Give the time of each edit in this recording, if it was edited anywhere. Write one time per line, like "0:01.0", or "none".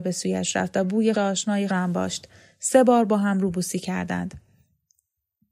0:01.1
0:01.7